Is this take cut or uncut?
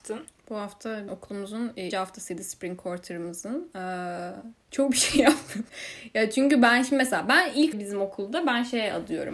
cut